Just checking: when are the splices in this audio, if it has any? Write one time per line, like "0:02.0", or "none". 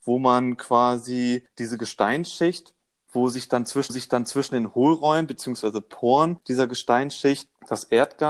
0:03.9